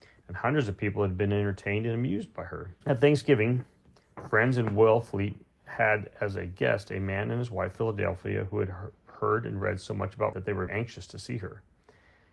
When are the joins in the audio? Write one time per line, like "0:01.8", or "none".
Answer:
0:02.8
0:10.3
0:10.7